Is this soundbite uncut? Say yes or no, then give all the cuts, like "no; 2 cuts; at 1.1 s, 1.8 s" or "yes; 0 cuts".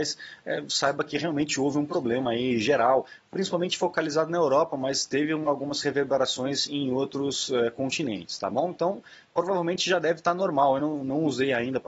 yes; 0 cuts